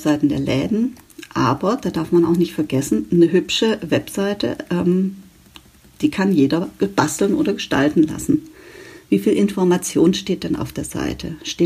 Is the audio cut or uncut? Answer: uncut